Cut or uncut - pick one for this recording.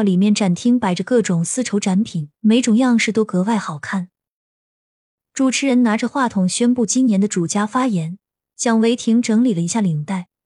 cut